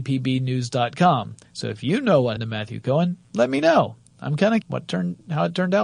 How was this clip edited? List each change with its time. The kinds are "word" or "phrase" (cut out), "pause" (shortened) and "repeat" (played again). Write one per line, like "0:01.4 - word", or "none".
0:01.5 - pause
0:02.4 - word
0:03.2 - pause
0:04.6 - word